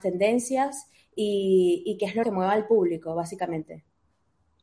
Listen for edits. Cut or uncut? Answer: cut